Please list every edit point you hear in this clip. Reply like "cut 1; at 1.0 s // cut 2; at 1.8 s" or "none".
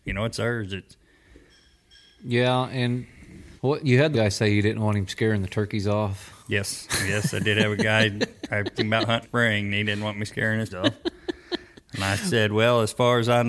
cut 1; at 3.6 s // cut 2; at 4.1 s // cut 3; at 6.4 s // cut 4; at 8.7 s // cut 5; at 9.2 s // cut 6; at 10.7 s